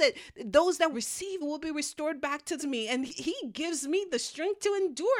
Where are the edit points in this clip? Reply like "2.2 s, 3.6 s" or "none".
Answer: 0.9 s, 1.4 s, 2.6 s, 3.1 s